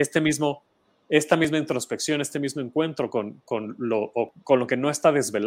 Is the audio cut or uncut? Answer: cut